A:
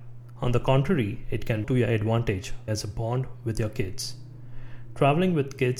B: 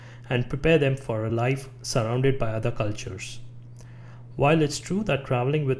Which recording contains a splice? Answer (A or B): A